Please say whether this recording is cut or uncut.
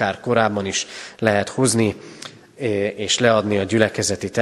uncut